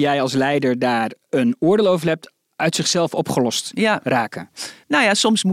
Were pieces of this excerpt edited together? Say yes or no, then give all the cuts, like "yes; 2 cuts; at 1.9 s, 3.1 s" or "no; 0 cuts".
no; 0 cuts